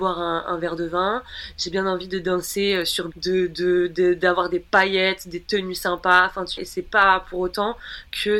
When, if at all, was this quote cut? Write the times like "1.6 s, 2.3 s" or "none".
3.1 s, 6.6 s